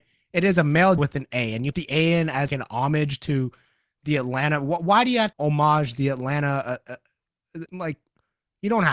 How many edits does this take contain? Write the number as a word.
five